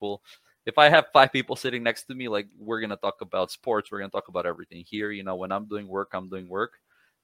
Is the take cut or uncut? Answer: cut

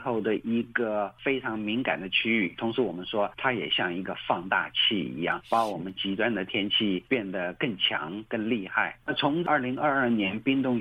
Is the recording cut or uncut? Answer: uncut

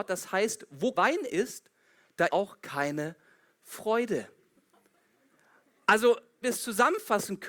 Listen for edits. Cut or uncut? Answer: cut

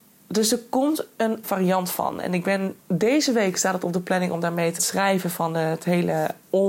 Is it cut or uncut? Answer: cut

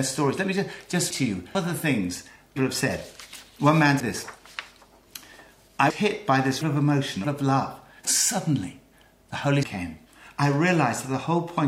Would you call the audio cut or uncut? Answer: cut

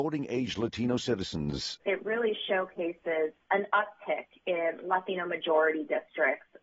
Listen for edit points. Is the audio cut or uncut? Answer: uncut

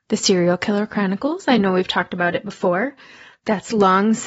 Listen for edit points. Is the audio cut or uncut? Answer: uncut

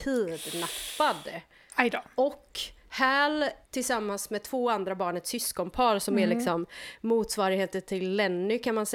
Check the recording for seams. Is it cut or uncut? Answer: cut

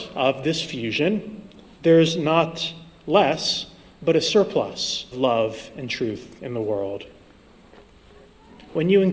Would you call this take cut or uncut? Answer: cut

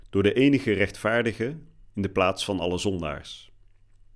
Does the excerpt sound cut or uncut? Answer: uncut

